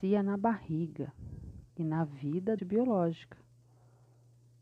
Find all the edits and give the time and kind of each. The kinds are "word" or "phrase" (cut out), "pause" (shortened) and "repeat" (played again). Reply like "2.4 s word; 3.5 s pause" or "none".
1.7 s pause; 2.6 s phrase